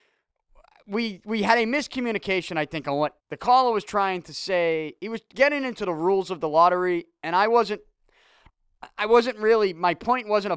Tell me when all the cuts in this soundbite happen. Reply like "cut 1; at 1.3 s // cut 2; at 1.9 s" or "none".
cut 1; at 3.2 s